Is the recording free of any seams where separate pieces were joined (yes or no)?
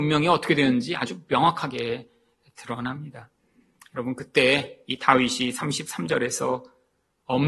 yes